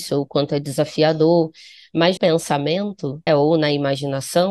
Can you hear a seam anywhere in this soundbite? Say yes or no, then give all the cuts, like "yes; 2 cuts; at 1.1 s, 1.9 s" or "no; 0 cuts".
yes; 2 cuts; at 2.2 s, 3.3 s